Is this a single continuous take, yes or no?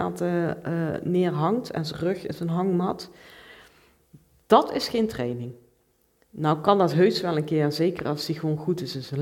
yes